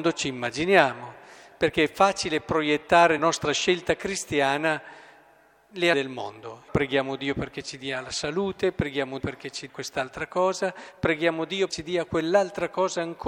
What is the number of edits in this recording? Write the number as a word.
six